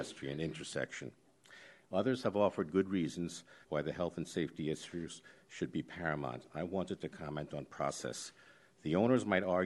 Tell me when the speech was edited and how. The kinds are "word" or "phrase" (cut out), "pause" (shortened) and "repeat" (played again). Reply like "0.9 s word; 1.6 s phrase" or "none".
3.6 s pause